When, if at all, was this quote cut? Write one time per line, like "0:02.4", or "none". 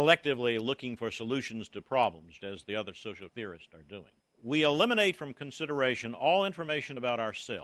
0:02.4
0:03.3
0:04.2

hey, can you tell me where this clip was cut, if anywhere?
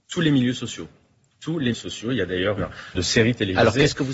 0:01.7
0:02.6
0:02.9

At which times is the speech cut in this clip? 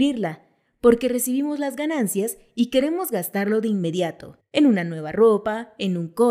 0:04.4

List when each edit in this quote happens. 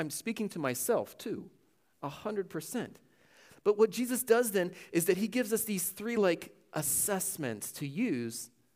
none

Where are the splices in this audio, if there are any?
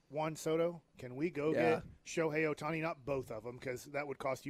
none

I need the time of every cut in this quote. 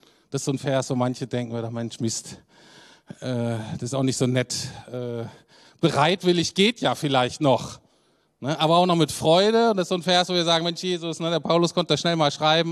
none

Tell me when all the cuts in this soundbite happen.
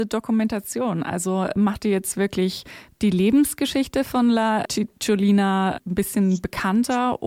0:04.6

